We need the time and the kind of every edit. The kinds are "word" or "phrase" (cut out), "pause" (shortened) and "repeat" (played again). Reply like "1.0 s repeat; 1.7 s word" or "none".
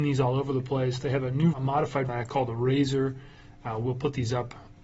1.5 s word; 2.1 s word